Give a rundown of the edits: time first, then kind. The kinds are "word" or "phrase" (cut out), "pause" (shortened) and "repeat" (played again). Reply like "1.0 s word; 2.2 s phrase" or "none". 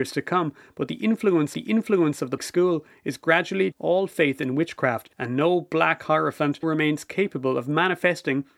1.5 s repeat; 2.4 s word; 3.7 s word; 5.1 s pause; 6.6 s word

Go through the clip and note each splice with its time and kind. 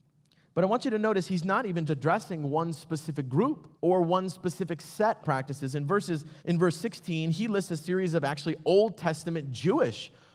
1.9 s word; 3.8 s pause; 5.2 s phrase; 6.4 s pause

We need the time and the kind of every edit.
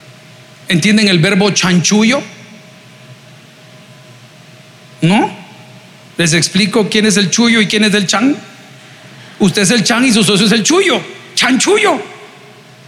none

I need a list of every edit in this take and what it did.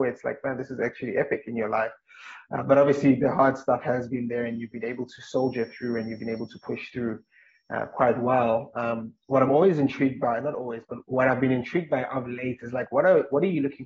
none

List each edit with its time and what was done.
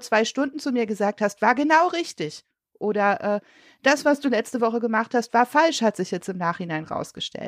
none

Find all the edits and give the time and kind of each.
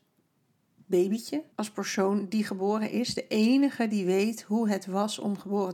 1.5 s pause

